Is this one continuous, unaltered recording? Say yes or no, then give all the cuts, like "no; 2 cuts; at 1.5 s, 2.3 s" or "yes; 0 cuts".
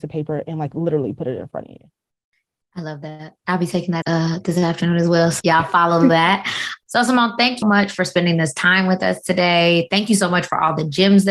no; 4 cuts; at 4.0 s, 5.4 s, 6.9 s, 7.6 s